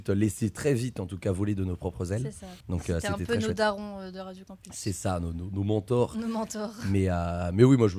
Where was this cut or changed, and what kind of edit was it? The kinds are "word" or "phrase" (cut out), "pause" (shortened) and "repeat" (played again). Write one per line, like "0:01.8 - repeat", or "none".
0:02.6 - pause